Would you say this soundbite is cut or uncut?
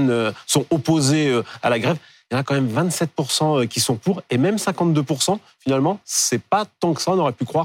uncut